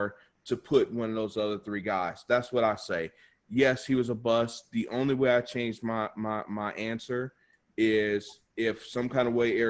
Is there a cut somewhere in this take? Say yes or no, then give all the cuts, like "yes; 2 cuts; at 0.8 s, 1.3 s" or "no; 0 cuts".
no; 0 cuts